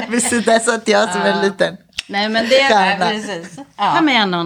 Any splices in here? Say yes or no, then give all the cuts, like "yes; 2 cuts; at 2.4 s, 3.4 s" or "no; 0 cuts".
no; 0 cuts